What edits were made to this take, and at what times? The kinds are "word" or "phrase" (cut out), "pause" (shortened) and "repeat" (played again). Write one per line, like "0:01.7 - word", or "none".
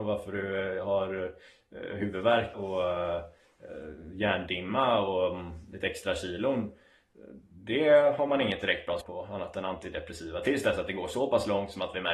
0:02.5 - word
0:09.0 - word